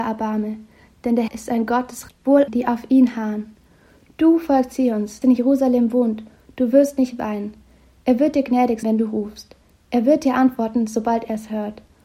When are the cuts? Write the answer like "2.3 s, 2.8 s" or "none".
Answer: 1.3 s, 2.1 s, 2.5 s, 5.2 s, 8.8 s